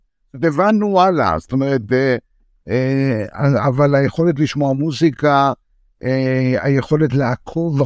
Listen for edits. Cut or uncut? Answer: uncut